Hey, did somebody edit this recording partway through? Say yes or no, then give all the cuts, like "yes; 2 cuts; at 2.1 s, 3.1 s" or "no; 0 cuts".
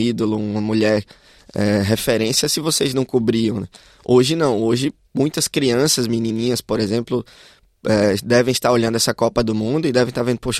no; 0 cuts